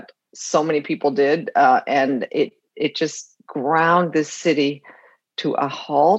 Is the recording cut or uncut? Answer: uncut